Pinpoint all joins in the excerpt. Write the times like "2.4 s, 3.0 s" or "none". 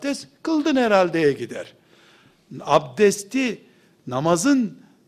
none